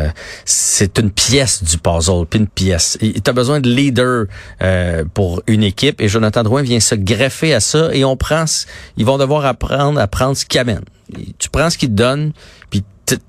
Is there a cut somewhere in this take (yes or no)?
yes